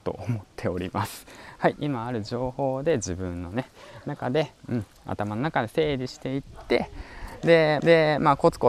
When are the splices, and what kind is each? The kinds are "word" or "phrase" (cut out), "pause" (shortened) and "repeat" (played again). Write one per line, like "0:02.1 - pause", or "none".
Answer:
0:01.7 - phrase
0:07.8 - repeat